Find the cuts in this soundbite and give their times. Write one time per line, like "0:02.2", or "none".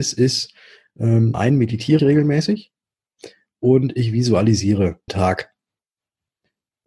0:01.3
0:02.0
0:05.1